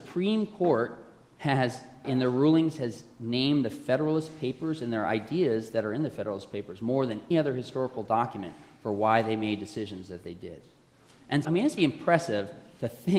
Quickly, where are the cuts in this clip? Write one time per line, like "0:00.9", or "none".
0:02.0
0:07.3
0:11.4
0:11.8